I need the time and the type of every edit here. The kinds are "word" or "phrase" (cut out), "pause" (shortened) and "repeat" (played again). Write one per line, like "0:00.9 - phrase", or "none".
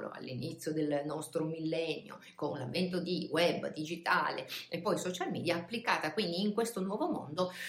none